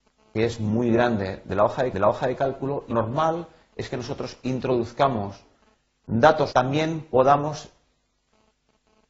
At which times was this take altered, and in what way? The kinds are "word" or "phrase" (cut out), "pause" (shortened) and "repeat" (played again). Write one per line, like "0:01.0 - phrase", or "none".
0:01.9 - repeat
0:02.9 - word
0:06.5 - phrase